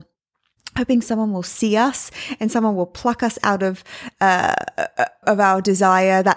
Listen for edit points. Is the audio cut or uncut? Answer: cut